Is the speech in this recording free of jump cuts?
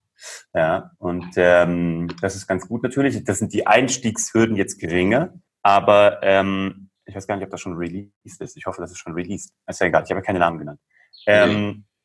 no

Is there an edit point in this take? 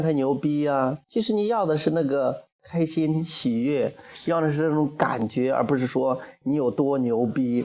yes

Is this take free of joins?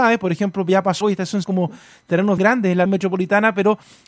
no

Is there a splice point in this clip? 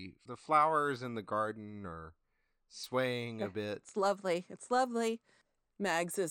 no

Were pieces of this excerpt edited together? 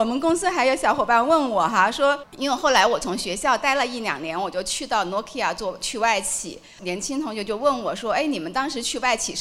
no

